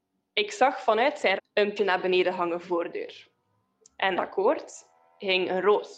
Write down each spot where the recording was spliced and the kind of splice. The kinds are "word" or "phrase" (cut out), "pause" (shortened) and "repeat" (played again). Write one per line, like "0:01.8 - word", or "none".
0:01.4 - word
0:01.8 - word
0:02.6 - phrase
0:04.2 - word

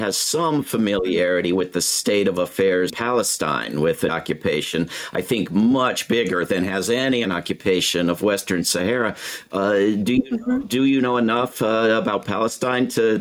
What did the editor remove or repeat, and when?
0:02.9 - word
0:04.1 - word
0:07.2 - phrase

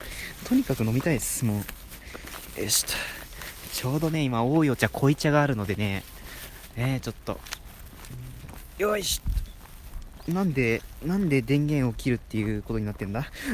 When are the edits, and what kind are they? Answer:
none

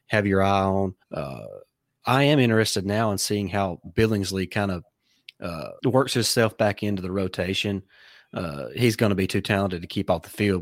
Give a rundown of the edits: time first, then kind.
0:01.0 - pause
0:05.8 - pause

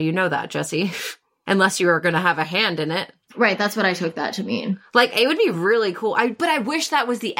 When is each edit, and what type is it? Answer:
none

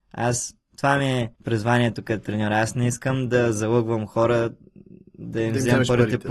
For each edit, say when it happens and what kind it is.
0:01.4 - pause

